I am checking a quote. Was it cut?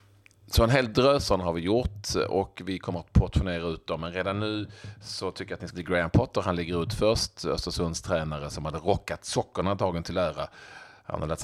yes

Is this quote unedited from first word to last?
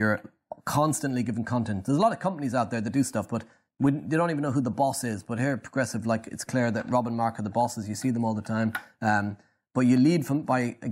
no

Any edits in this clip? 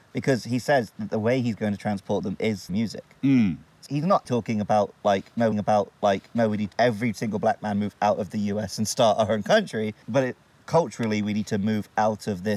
yes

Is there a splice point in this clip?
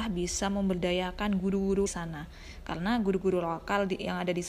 yes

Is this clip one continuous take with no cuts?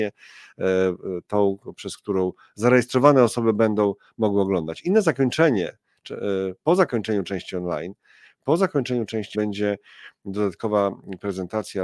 no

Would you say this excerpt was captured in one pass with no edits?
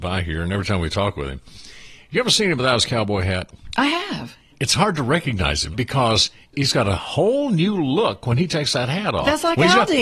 no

